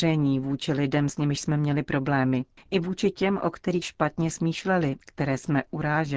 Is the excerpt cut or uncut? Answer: cut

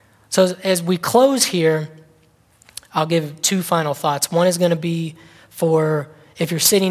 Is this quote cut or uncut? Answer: uncut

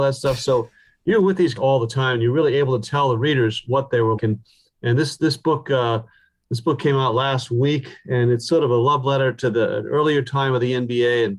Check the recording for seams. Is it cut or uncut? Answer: cut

